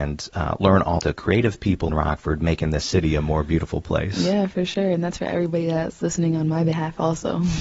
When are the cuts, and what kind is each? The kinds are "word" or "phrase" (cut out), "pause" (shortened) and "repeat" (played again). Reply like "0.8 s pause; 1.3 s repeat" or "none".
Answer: 1.0 s word; 1.9 s word